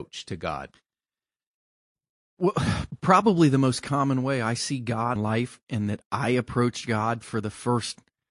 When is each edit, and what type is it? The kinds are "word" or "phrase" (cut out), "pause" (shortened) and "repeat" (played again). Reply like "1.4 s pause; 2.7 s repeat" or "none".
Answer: 5.2 s phrase